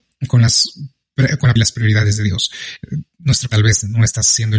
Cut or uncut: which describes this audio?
cut